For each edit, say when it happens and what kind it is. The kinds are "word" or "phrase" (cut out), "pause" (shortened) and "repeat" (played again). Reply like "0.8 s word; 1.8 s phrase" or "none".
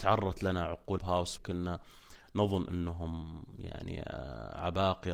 1.0 s phrase; 1.4 s word